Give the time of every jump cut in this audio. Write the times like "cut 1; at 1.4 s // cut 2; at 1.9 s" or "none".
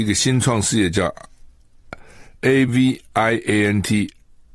none